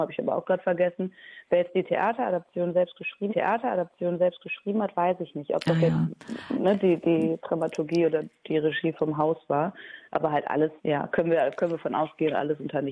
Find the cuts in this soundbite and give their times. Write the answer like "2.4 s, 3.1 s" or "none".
3.3 s, 7.0 s, 10.1 s, 10.8 s